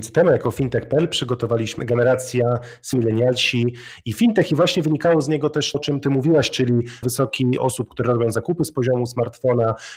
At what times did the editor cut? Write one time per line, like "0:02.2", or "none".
0:01.8
0:02.9
0:05.7
0:07.0
0:07.6